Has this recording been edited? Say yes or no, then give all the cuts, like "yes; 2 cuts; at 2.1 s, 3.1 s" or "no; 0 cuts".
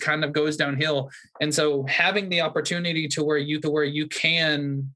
yes; 1 cut; at 3.6 s